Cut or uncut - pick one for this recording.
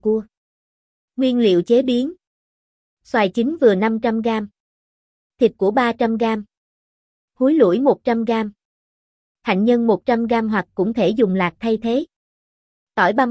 uncut